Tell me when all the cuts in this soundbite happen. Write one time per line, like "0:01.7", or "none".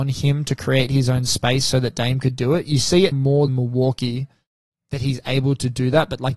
0:03.1
0:03.5